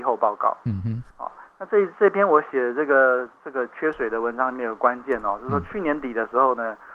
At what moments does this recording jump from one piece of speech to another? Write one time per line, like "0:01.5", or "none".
0:01.1